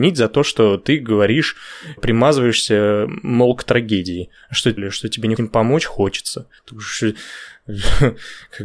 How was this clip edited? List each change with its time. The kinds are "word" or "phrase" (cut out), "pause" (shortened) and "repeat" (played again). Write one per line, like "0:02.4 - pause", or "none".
0:02.0 - word
0:04.8 - phrase
0:05.4 - word
0:06.6 - pause